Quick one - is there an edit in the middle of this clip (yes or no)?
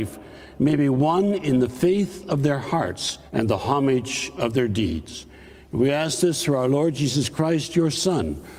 yes